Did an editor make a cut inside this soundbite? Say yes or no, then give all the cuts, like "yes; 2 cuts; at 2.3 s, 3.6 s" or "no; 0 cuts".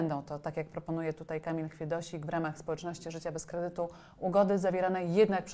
no; 0 cuts